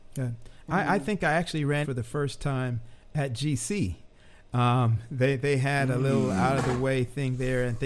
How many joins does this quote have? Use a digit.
1